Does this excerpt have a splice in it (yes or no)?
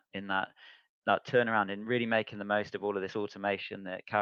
no